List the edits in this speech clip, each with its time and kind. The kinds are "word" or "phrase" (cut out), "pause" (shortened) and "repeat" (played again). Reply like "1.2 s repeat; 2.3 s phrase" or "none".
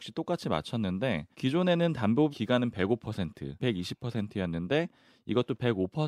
1.3 s pause; 2.3 s word; 3.6 s word